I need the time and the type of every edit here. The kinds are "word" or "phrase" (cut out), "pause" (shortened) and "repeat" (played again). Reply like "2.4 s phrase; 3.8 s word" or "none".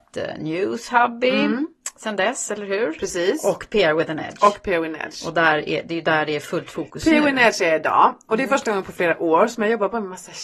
none